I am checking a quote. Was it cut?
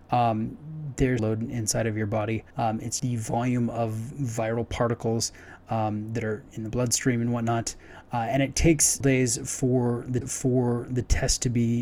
yes; 5 cuts; at 1.2 s, 2.5 s, 3.0 s, 9.0 s, 10.2 s

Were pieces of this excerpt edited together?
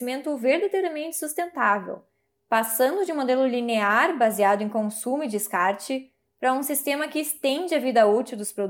no; 0 cuts

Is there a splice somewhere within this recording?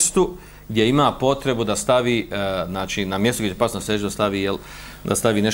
no; 0 cuts

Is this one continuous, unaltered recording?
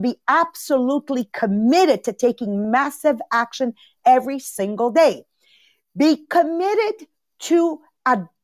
yes; 0 cuts

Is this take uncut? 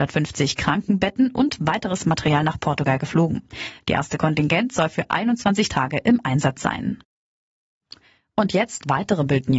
yes; 0 cuts

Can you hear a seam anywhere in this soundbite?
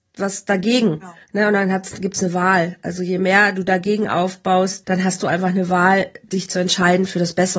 yes; 2 cuts; at 1.2 s, 4.8 s

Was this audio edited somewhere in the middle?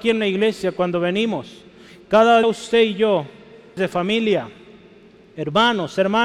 yes; 2 cuts; at 2.4 s, 3.8 s

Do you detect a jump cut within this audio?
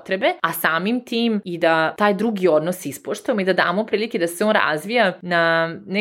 no; 0 cuts

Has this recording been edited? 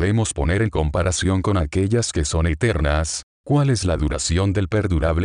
no; 0 cuts

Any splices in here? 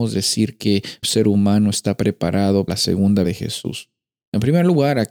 yes; 3 cuts; at 1.0 s, 2.7 s, 3.2 s

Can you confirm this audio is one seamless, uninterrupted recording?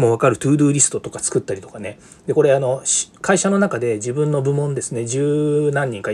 yes; 0 cuts

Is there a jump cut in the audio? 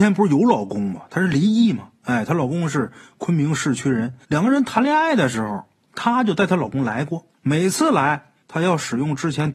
yes; 4 cuts; at 2.0 s, 4.2 s, 7.3 s, 8.4 s

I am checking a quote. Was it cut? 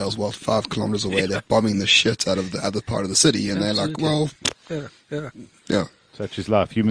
no; 0 cuts

